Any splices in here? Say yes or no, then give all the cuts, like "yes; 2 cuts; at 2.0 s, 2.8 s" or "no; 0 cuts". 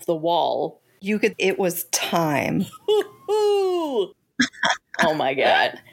yes; 1 cut; at 1.3 s